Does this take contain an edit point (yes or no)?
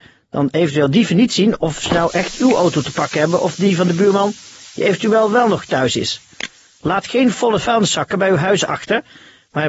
no